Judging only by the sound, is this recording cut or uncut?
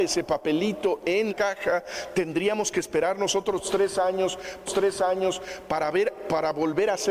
cut